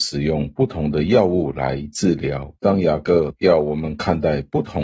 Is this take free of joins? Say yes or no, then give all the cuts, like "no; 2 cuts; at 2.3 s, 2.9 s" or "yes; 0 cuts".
no; 1 cut; at 2.6 s